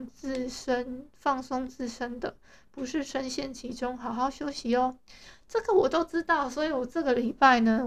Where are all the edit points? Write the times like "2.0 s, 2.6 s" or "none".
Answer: none